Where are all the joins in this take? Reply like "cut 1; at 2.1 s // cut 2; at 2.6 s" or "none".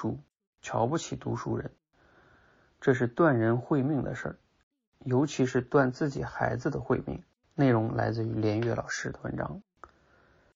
cut 1; at 7.4 s